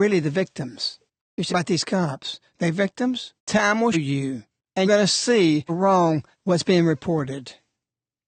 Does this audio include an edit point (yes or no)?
yes